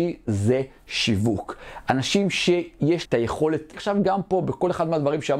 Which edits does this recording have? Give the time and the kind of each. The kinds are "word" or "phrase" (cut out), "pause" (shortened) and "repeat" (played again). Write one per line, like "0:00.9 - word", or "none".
0:03.1 - word
0:03.7 - word

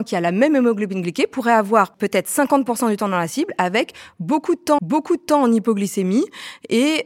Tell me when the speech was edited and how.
0:04.8 - repeat

